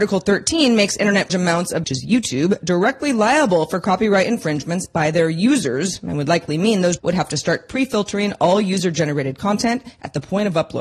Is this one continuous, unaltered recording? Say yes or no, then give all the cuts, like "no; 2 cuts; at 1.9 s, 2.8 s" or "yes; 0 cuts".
no; 3 cuts; at 1.3 s, 1.8 s, 7.0 s